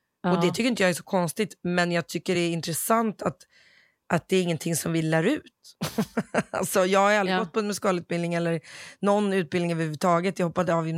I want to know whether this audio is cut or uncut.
uncut